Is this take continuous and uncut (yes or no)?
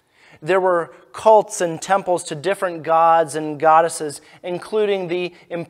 yes